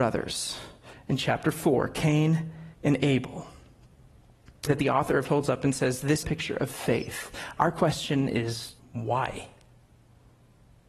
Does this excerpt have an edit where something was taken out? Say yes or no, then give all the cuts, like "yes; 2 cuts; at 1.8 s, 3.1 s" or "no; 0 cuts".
yes; 5 cuts; at 2.7 s, 4.7 s, 5.3 s, 6.2 s, 8.8 s